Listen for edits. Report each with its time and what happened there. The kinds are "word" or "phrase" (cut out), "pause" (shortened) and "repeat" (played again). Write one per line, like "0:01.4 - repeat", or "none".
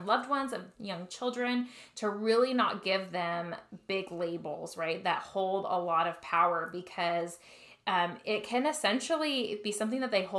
none